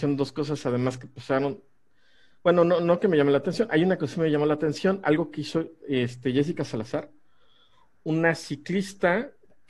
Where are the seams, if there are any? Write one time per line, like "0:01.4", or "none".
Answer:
none